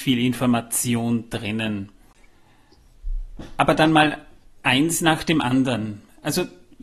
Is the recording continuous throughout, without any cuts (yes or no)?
yes